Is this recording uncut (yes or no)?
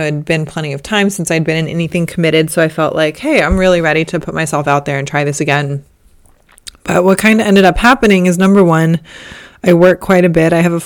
yes